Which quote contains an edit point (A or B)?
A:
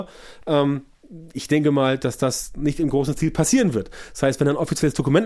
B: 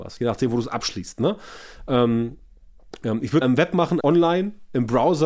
B